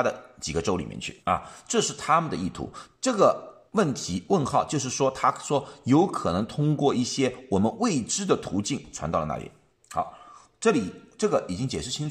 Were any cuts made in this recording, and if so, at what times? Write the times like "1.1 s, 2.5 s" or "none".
1.2 s, 3.7 s, 9.7 s